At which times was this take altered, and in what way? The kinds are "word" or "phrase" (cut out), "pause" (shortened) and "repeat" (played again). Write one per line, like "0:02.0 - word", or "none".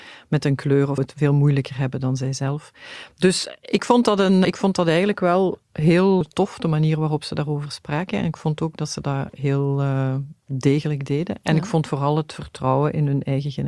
0:01.0 - word
0:04.4 - word
0:06.2 - word

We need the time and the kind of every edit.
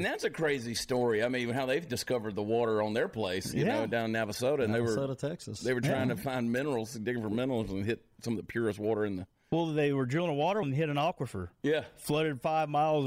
0:10.6 - word

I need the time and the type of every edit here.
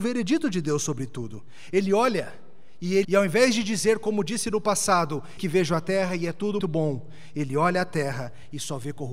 0:03.0 - word
0:05.4 - word
0:06.6 - word

